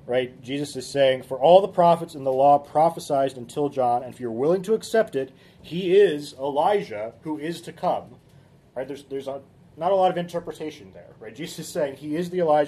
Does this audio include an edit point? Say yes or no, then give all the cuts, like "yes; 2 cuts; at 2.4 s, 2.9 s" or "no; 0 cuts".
no; 0 cuts